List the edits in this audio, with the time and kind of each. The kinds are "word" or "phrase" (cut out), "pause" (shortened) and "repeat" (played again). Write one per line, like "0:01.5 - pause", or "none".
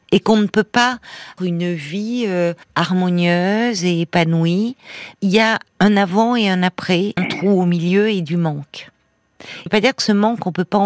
0:01.4 - word
0:02.6 - pause
0:05.1 - word
0:05.7 - pause
0:07.2 - word
0:09.7 - phrase